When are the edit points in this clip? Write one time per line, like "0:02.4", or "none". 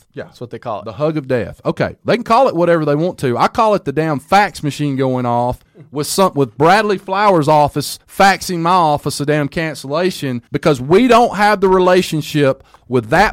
0:05.7
0:08.0
0:10.5